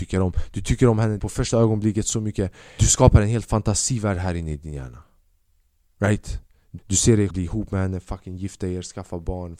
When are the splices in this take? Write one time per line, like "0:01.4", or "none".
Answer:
0:01.2
0:02.8
0:06.8
0:07.3